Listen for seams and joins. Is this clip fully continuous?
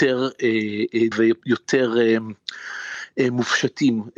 no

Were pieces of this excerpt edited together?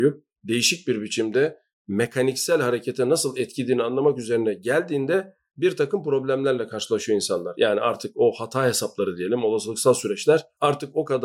no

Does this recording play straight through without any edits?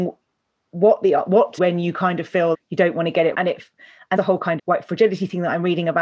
no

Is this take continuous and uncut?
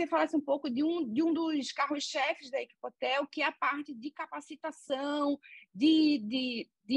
yes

